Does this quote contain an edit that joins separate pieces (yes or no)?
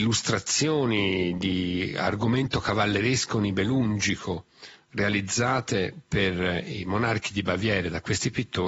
no